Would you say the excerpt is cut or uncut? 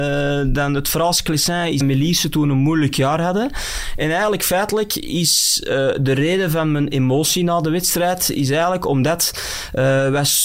cut